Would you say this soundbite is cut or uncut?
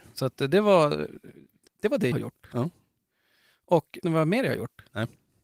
cut